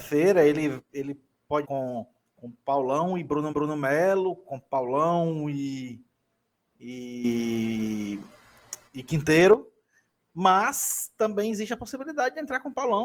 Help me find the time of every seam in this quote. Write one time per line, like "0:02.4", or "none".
0:01.6
0:02.2
0:03.5
0:08.9